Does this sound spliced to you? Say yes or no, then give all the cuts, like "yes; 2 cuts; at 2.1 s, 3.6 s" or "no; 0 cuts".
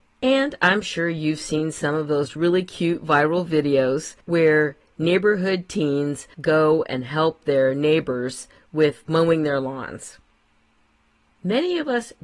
no; 0 cuts